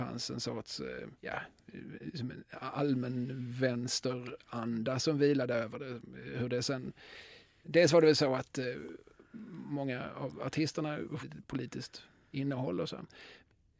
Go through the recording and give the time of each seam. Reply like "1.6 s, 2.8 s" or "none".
1.2 s, 11.2 s